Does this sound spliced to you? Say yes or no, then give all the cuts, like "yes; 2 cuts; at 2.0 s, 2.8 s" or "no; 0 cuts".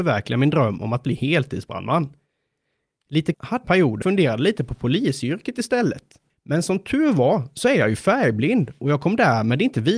yes; 4 cuts; at 3.3 s, 3.6 s, 4.0 s, 6.3 s